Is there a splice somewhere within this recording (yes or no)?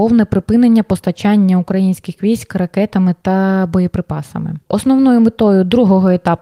yes